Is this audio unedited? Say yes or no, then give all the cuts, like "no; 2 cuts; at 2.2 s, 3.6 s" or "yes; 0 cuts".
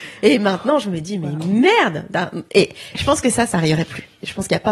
yes; 0 cuts